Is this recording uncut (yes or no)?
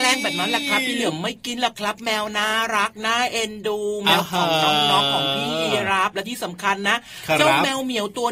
yes